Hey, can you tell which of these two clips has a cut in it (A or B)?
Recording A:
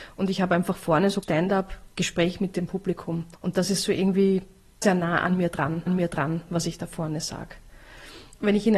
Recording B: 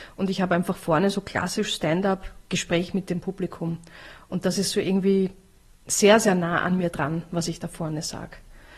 A